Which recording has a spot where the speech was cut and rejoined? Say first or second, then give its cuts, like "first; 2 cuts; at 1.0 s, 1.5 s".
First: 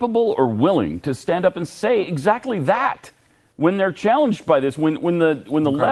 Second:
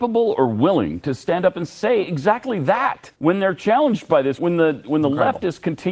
second; 2 cuts; at 3.1 s, 4.4 s